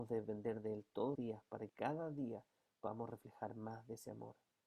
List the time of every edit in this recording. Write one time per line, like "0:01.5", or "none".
0:01.1
0:01.7